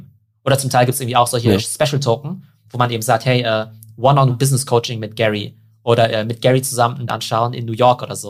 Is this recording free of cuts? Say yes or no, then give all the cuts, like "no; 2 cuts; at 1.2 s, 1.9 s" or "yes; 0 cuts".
no; 3 cuts; at 4.3 s, 6.1 s, 7.1 s